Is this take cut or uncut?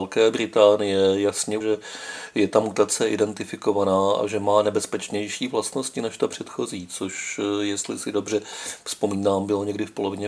cut